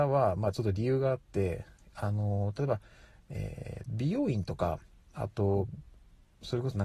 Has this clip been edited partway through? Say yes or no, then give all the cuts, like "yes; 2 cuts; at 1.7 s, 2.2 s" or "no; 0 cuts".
yes; 1 cut; at 3.9 s